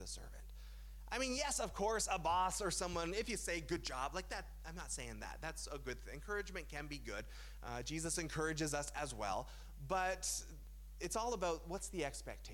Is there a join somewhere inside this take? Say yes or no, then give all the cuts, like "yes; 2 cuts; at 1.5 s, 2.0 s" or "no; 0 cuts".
no; 0 cuts